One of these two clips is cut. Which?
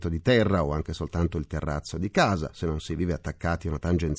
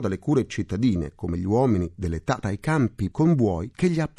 second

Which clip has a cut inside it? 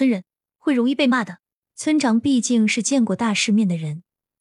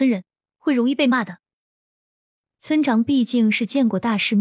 first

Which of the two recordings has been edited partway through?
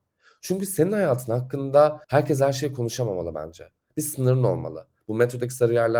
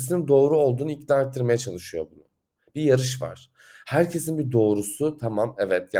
first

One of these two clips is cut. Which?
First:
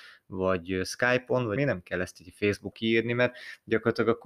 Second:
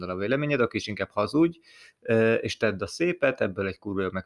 first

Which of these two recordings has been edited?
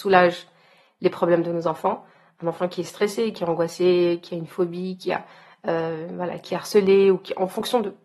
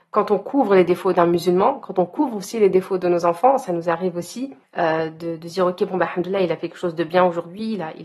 second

